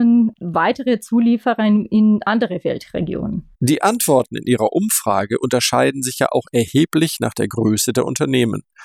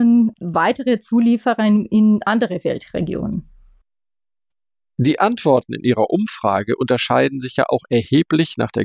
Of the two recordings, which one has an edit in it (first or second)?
first